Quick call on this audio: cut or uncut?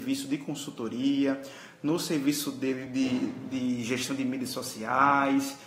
uncut